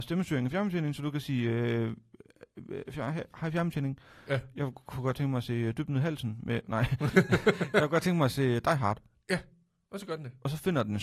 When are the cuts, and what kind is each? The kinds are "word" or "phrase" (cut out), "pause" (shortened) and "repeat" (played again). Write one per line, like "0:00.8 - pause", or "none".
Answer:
none